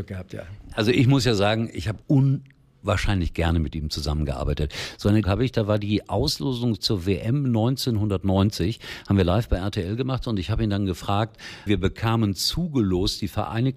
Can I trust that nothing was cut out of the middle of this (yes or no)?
no